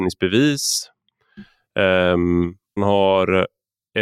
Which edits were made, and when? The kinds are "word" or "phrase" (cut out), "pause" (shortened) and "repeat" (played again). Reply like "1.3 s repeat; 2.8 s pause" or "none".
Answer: 2.8 s word